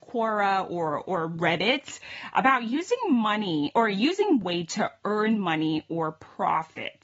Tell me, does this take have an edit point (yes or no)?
yes